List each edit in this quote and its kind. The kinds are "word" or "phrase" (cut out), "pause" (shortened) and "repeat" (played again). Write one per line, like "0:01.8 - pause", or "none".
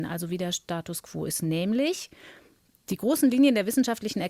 none